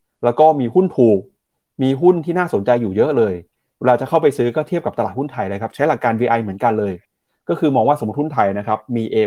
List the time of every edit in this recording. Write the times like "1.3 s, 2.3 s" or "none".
none